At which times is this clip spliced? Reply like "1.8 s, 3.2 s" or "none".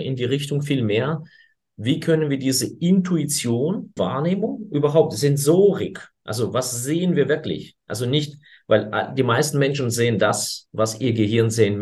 4.0 s